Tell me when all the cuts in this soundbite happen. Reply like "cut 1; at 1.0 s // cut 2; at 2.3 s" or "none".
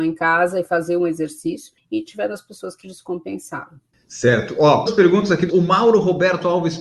cut 1; at 2.8 s // cut 2; at 4.9 s // cut 3; at 5.5 s